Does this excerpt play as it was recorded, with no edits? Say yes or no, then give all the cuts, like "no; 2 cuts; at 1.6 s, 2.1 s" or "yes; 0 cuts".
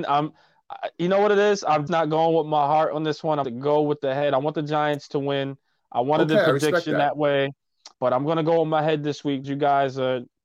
no; 4 cuts; at 1.9 s, 3.4 s, 7.9 s, 9.4 s